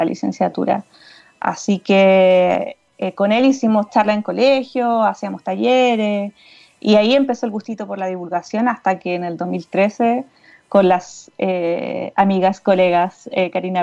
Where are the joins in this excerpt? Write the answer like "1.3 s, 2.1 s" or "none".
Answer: none